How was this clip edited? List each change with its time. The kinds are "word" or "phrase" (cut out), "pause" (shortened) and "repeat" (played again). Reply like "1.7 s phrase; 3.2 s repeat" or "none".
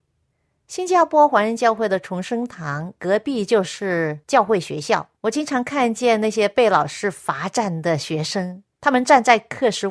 5.2 s pause; 8.7 s pause